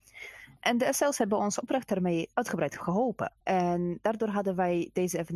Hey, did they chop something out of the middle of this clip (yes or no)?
yes